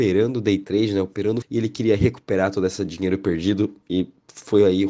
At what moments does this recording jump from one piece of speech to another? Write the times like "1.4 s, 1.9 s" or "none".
1.4 s